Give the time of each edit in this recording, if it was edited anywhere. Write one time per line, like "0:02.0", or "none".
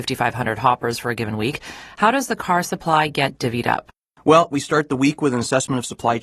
none